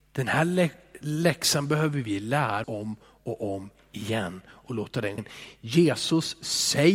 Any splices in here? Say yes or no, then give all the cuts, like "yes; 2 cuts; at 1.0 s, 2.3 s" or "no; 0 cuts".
yes; 2 cuts; at 2.6 s, 5.2 s